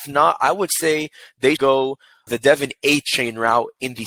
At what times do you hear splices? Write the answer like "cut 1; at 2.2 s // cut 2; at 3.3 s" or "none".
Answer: cut 1; at 1.6 s // cut 2; at 2.3 s